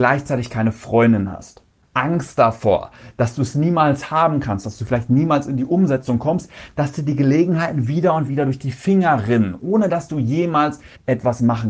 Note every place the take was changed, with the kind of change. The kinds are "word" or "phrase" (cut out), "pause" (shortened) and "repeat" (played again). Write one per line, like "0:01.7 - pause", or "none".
none